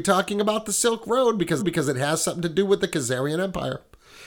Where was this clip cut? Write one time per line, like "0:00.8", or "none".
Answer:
0:01.6